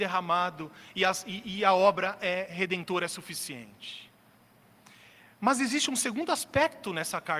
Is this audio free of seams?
yes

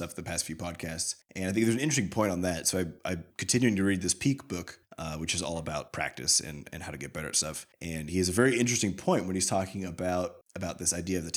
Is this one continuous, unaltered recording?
yes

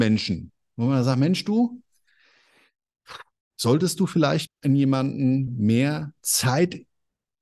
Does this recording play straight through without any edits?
no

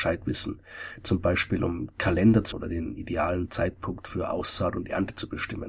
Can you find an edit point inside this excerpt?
yes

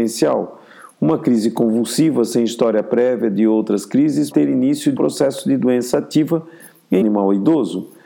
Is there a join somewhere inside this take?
yes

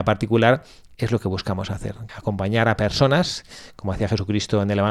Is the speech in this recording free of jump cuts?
no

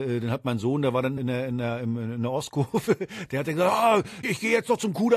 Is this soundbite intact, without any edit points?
no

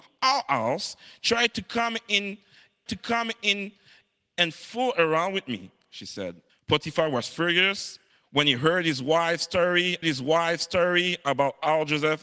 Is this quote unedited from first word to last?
no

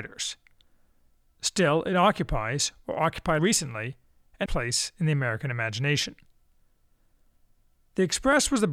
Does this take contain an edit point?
yes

